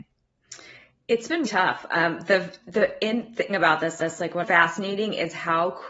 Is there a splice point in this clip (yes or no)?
yes